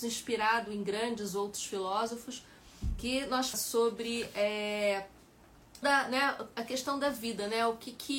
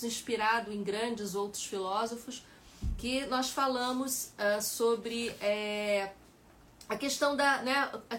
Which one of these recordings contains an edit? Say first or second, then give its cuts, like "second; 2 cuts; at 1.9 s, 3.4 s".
first; 2 cuts; at 3.5 s, 5.8 s